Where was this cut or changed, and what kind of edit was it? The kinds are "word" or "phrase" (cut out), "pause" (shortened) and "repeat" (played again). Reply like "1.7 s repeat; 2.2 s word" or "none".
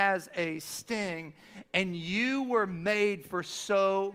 none